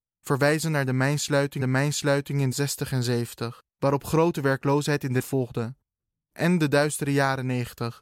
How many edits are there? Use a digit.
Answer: 4